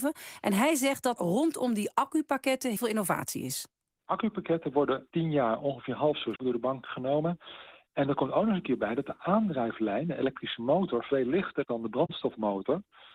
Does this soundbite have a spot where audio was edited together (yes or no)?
yes